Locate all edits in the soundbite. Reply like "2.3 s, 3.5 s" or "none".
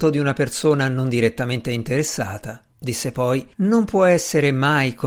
2.7 s, 3.5 s